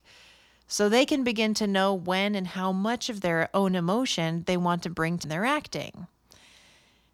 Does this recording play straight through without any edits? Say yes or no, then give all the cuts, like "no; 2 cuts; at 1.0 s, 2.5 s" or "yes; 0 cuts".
no; 1 cut; at 5.2 s